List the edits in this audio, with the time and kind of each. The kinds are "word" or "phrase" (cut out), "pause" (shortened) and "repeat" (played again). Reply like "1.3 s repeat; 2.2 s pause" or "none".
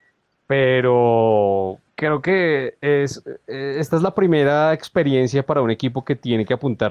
1.9 s pause